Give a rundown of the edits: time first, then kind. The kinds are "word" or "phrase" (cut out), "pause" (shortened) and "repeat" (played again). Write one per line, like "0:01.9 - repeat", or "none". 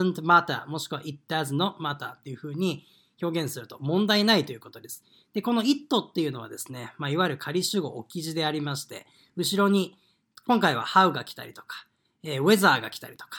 none